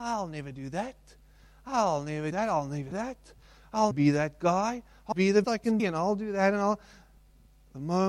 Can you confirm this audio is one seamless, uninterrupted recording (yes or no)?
no